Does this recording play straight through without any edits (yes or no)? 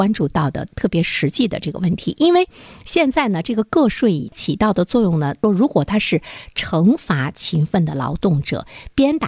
yes